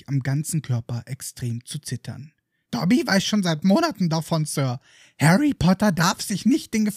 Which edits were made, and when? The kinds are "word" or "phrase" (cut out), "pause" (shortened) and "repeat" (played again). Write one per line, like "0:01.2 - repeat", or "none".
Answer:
none